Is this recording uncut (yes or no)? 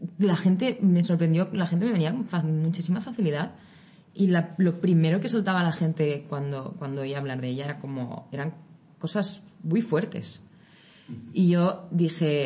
yes